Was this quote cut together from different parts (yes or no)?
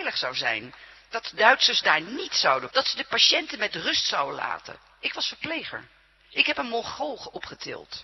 yes